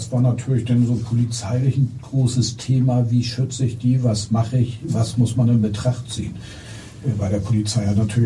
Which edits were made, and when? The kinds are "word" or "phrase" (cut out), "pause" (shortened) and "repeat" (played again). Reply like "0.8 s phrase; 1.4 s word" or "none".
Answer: none